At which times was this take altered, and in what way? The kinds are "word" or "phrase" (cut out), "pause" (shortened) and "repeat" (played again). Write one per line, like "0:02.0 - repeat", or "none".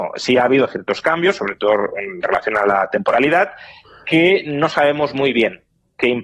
none